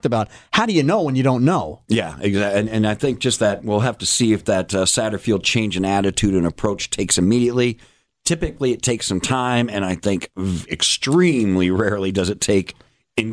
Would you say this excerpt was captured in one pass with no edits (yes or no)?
yes